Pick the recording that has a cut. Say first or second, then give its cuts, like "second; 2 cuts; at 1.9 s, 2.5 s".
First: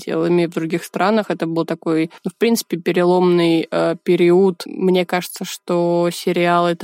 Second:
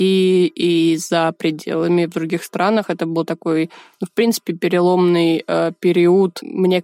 first; 1 cut; at 2.2 s